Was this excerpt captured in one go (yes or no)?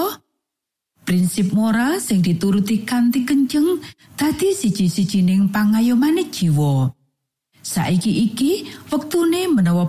yes